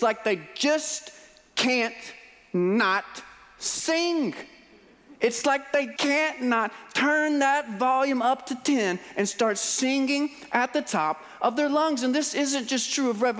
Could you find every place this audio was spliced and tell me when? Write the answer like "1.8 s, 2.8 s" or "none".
6.0 s